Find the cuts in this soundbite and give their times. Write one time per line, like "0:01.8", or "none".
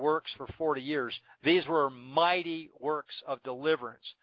none